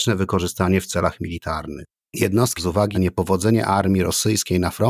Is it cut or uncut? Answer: cut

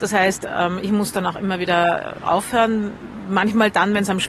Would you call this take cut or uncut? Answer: uncut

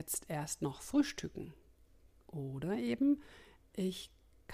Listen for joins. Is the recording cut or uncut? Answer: uncut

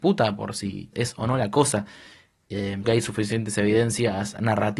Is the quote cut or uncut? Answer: cut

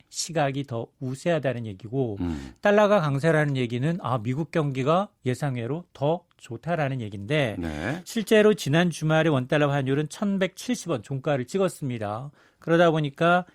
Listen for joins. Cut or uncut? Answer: uncut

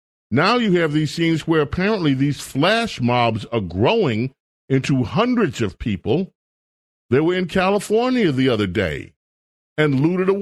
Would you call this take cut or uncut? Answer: uncut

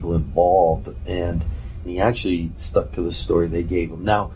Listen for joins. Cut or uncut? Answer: cut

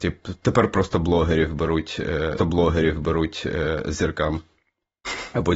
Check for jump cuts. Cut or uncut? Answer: cut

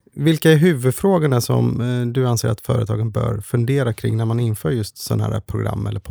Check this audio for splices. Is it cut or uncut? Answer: uncut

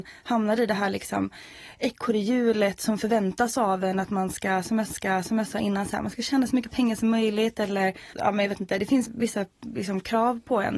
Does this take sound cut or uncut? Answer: cut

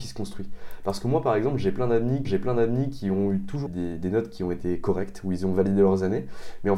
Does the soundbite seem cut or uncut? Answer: cut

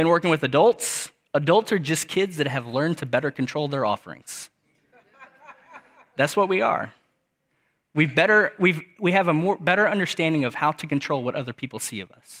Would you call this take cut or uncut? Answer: uncut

